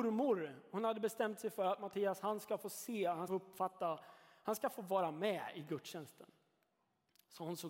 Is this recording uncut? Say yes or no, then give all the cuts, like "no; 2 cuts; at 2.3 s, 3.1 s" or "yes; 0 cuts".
no; 1 cut; at 3.3 s